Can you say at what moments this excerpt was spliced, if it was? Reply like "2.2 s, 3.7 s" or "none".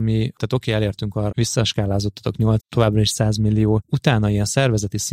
1.3 s, 2.6 s